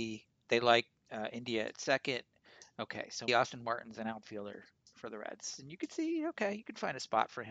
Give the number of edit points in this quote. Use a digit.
1